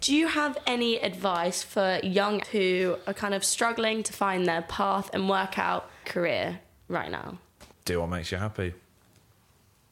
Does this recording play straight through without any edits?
no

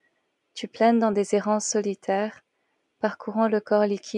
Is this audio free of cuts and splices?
yes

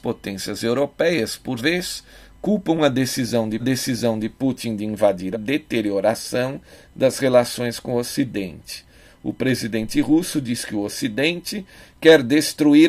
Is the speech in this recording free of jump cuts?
no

